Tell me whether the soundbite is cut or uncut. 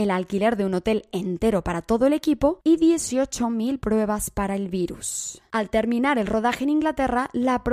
uncut